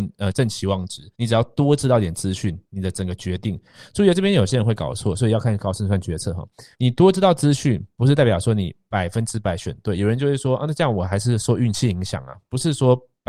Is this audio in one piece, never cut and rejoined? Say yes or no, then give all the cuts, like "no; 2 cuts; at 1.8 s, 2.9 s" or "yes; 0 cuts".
no; 2 cuts; at 1.1 s, 6.7 s